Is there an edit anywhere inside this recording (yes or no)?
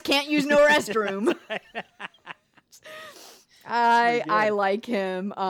no